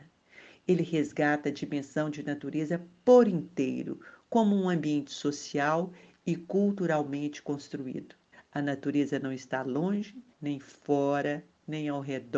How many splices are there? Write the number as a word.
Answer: two